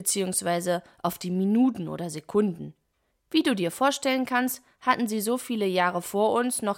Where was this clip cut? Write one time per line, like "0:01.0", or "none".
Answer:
none